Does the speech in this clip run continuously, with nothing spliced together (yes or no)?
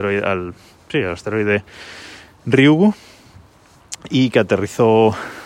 yes